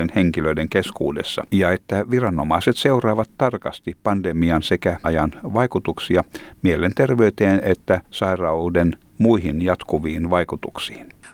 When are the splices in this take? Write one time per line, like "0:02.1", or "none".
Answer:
0:01.5
0:05.0
0:08.1